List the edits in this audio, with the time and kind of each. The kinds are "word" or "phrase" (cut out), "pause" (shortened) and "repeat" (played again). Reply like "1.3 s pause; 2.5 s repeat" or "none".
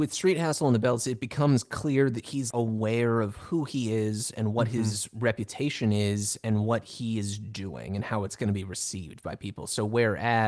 2.5 s word